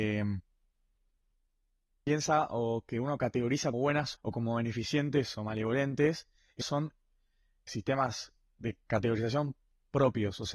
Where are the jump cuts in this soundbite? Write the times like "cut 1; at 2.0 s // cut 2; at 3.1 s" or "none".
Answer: cut 1; at 3.7 s // cut 2; at 4.1 s // cut 3; at 6.6 s // cut 4; at 7.7 s